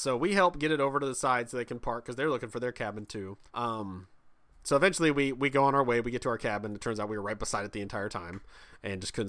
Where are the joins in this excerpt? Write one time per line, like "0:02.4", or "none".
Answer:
0:03.5